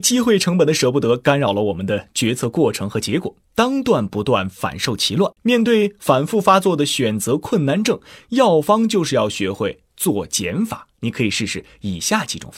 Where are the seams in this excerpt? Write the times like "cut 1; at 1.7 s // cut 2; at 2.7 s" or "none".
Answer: cut 1; at 3.4 s // cut 2; at 5.4 s // cut 3; at 10.9 s